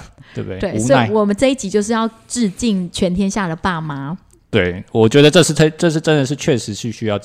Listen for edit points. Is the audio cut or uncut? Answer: uncut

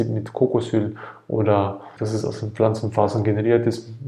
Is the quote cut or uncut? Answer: cut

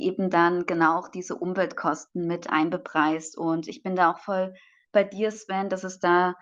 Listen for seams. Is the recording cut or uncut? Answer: uncut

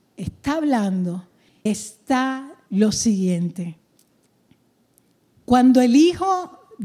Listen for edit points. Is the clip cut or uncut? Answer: cut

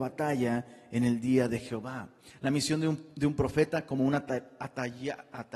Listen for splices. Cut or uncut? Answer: uncut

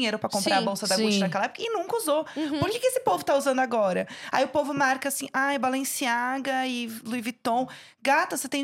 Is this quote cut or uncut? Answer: uncut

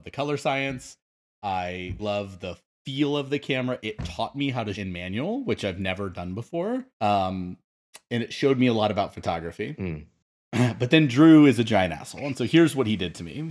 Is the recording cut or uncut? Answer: cut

